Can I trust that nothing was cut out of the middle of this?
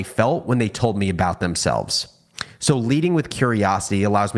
yes; 0 cuts

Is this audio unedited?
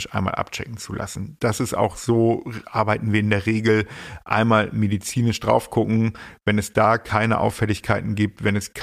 yes; 0 cuts

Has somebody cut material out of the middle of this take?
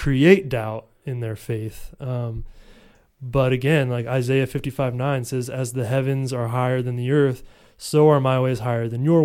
no; 0 cuts

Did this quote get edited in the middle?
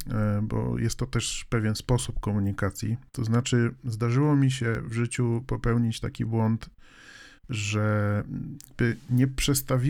no; 0 cuts

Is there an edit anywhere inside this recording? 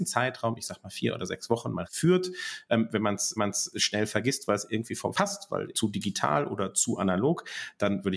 yes; 4 cuts; at 1.9 s, 3.4 s, 5.1 s, 5.7 s

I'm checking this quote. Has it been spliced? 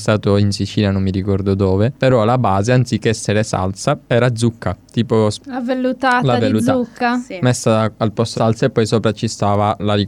yes; 1 cut; at 8.4 s

